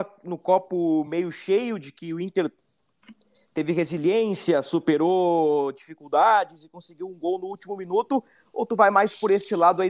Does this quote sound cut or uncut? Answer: uncut